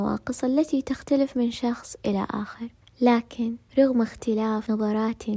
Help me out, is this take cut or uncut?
uncut